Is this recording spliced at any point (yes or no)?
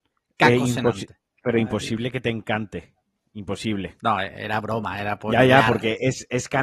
no